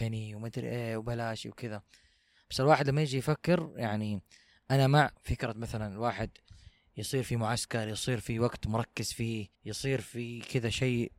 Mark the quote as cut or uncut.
cut